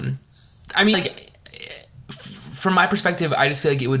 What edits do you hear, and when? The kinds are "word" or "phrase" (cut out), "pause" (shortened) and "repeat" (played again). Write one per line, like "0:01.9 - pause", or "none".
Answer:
0:00.9 - word